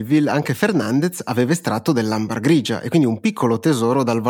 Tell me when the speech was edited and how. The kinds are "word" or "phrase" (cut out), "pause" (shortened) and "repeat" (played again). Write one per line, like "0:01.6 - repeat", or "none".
none